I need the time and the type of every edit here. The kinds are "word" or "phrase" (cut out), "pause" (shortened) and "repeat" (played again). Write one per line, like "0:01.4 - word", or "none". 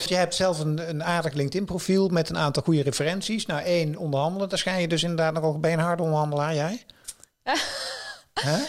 none